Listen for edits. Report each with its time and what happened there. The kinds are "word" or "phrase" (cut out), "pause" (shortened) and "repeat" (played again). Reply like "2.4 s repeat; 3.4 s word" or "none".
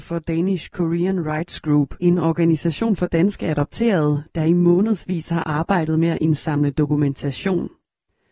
2.0 s pause